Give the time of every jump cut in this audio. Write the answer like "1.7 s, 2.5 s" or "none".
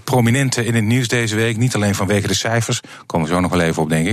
none